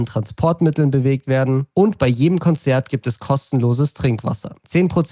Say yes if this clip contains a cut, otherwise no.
no